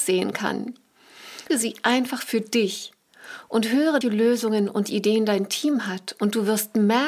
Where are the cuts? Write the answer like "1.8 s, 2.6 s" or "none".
1.5 s, 4.0 s